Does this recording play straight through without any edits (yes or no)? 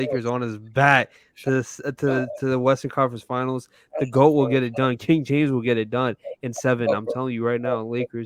yes